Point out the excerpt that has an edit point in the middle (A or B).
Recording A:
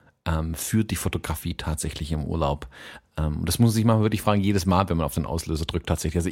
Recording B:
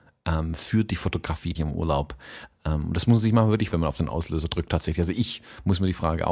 B